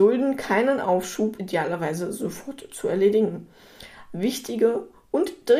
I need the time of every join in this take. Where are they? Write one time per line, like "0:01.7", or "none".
0:01.4